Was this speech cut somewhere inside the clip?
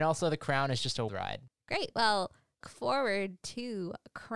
yes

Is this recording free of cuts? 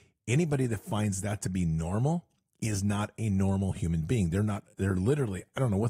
yes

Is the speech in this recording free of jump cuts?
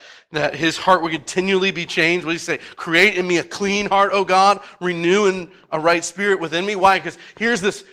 yes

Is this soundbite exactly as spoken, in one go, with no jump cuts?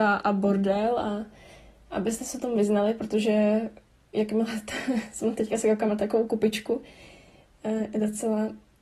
yes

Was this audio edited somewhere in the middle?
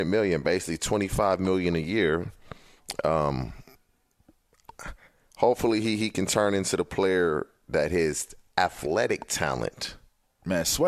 no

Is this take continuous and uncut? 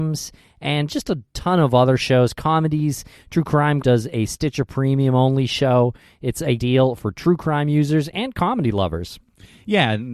no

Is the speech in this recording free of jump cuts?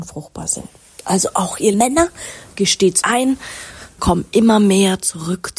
no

